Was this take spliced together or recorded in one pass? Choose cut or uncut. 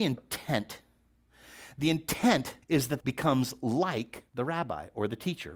cut